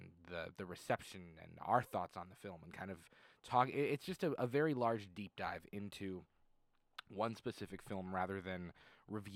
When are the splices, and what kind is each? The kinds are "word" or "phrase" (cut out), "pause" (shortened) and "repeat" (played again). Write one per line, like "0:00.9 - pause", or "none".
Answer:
none